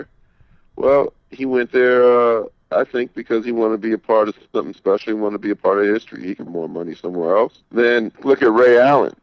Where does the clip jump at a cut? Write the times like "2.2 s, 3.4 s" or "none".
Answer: 6.5 s, 8.1 s